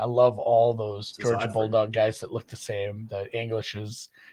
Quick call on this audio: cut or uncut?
uncut